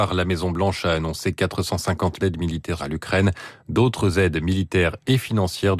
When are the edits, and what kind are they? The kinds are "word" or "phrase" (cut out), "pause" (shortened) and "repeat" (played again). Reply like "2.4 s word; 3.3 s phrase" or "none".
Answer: 2.2 s phrase; 2.8 s word